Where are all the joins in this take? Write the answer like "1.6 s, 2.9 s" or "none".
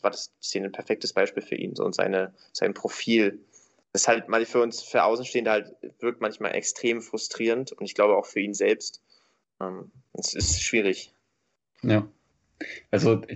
1.7 s